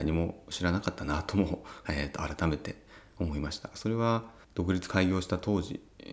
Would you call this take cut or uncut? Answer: cut